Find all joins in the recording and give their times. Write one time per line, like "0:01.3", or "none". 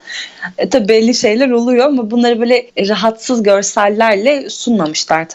0:02.7